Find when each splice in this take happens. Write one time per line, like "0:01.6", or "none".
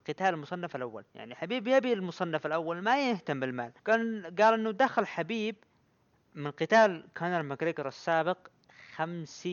0:01.1
0:03.8
0:05.9

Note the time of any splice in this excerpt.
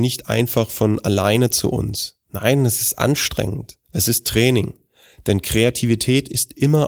0:02.2
0:03.8

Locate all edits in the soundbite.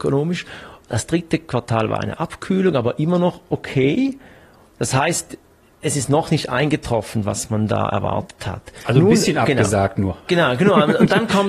none

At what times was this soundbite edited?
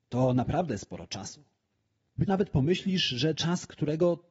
0:02.3
0:03.4

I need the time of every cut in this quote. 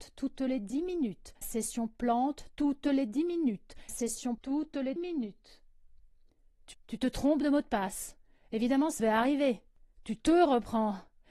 0:01.4
0:03.9
0:04.4
0:05.0
0:06.7
0:09.0

